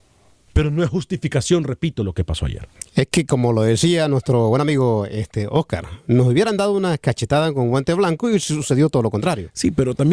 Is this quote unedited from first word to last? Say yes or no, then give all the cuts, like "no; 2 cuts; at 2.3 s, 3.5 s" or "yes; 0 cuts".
yes; 0 cuts